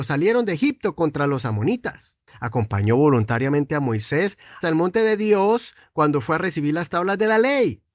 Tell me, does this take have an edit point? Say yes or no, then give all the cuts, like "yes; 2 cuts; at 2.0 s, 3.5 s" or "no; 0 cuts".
yes; 2 cuts; at 2.3 s, 4.6 s